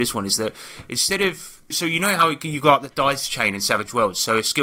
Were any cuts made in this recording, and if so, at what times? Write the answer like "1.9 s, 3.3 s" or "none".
1.7 s

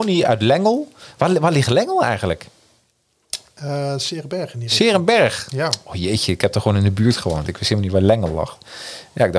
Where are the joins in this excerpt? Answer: none

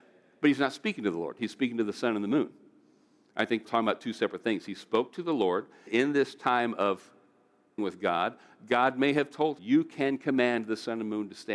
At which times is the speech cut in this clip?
3.6 s, 5.9 s, 7.8 s, 9.6 s

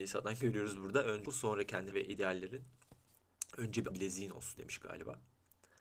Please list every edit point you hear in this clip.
1.3 s, 1.9 s, 3.9 s, 4.6 s

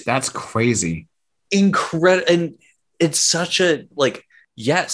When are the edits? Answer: none

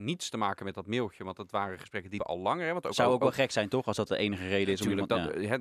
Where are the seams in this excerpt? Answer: 2.2 s

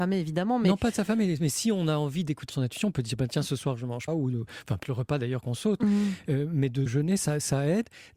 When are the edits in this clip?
2.5 s, 4.1 s, 4.8 s, 6.9 s

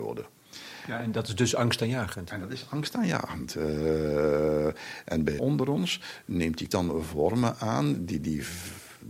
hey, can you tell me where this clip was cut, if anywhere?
5.4 s, 6.7 s

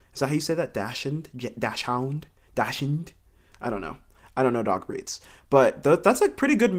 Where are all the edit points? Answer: none

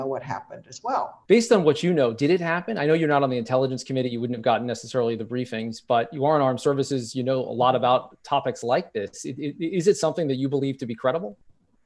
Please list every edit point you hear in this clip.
1.2 s

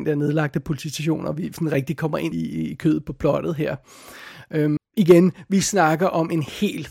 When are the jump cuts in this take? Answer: 2.3 s, 4.8 s

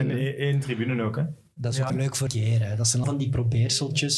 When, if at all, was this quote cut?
1.9 s, 2.3 s, 3.0 s

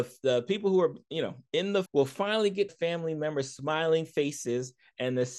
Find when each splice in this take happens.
1.5 s, 1.9 s, 2.7 s

